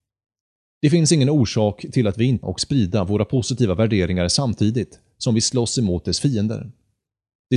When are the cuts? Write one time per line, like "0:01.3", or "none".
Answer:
0:02.4

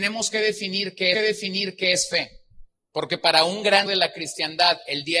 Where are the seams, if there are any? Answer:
0:01.1
0:02.7
0:03.9

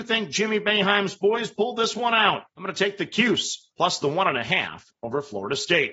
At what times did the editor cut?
0:02.5
0:03.7

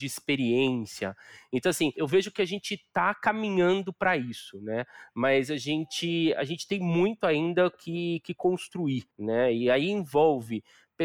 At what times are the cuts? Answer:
0:09.1

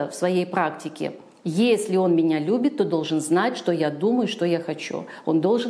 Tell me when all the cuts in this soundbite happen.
none

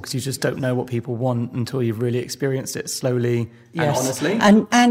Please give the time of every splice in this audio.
none

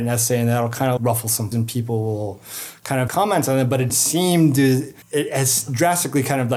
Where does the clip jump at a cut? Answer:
0:01.0
0:01.5
0:03.1
0:03.9
0:05.0

